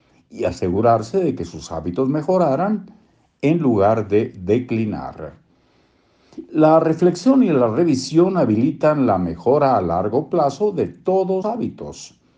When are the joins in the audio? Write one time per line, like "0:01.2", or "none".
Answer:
0:11.4